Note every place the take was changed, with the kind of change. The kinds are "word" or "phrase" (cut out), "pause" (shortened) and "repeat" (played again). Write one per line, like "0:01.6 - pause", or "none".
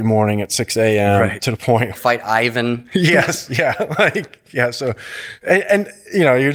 0:01.9 - phrase